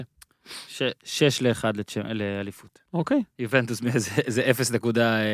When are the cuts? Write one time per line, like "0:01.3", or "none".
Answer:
0:02.9